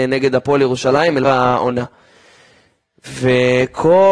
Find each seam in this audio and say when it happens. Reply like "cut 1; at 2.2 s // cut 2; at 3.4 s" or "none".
cut 1; at 1.2 s